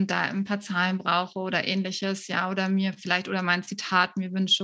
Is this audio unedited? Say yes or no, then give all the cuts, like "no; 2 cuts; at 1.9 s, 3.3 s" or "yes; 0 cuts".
yes; 0 cuts